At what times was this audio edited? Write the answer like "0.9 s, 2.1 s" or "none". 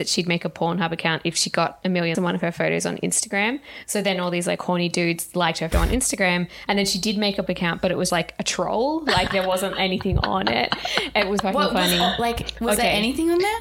2.1 s, 5.7 s, 7.5 s, 8.1 s, 11.4 s